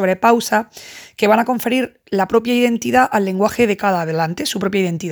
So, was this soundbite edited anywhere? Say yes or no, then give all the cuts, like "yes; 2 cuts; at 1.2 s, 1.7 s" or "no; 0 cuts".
no; 0 cuts